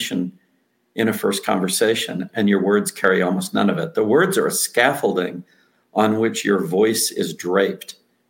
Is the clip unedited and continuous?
yes; 0 cuts

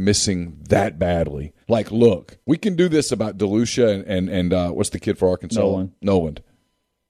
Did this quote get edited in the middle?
yes; 2 cuts; at 1.6 s, 2.4 s

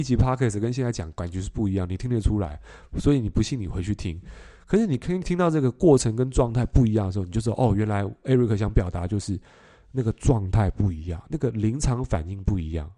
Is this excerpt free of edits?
yes; 0 cuts

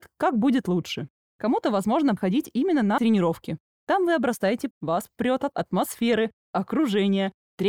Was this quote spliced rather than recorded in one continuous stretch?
yes; 4 cuts; at 2.2 s, 3.0 s, 4.7 s, 5.5 s

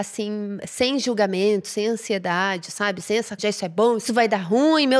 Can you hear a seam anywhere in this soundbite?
yes; 2 cuts; at 3.4 s, 4.1 s

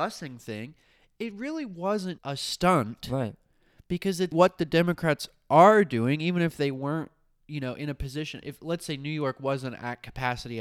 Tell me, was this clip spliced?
yes; 2 cuts; at 2.2 s, 4.3 s

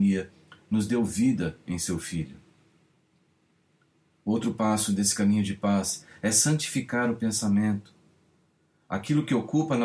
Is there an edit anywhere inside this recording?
no; 0 cuts

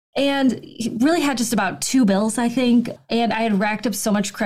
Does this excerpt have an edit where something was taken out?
no; 0 cuts

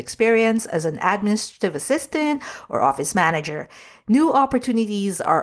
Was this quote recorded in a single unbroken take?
yes; 0 cuts

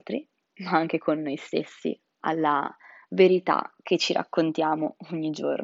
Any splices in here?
no; 0 cuts

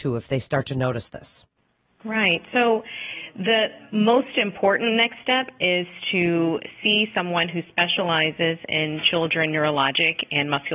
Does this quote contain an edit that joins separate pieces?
no; 0 cuts

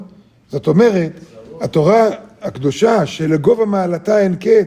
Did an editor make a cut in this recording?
no; 0 cuts

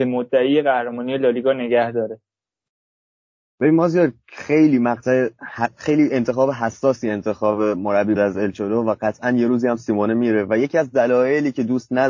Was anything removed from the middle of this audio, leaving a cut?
yes; 1 cut; at 8.2 s

